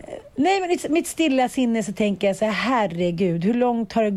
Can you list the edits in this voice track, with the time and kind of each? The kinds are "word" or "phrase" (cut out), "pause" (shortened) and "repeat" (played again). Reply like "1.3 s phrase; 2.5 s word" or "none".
none